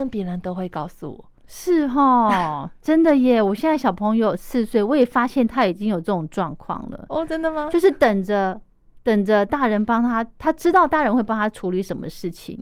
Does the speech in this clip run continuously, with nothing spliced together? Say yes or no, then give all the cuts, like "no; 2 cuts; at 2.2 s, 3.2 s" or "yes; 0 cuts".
yes; 0 cuts